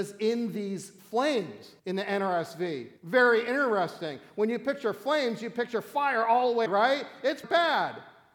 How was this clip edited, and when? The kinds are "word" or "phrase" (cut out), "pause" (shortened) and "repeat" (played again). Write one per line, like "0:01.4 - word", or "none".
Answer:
0:01.8 - pause
0:03.0 - pause
0:06.7 - word
0:07.4 - word